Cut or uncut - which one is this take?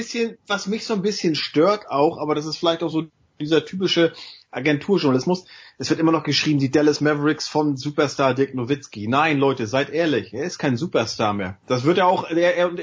uncut